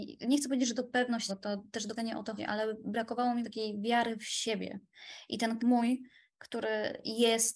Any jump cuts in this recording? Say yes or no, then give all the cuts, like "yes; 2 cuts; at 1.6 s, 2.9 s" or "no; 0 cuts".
yes; 5 cuts; at 1.3 s, 2.0 s, 2.4 s, 3.4 s, 5.6 s